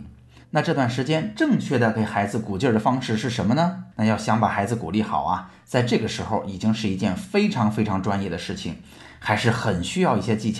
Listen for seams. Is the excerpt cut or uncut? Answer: cut